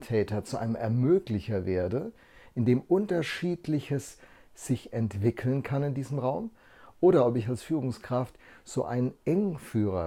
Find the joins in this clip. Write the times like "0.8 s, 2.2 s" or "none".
none